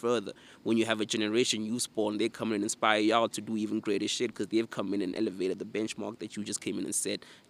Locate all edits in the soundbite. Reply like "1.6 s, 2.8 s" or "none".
none